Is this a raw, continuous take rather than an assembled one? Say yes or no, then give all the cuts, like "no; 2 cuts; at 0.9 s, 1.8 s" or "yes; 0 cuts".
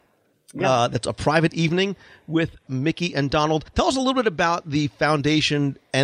no; 2 cuts; at 2.7 s, 3.7 s